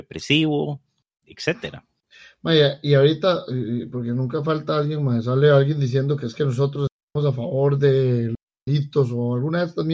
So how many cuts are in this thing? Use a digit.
0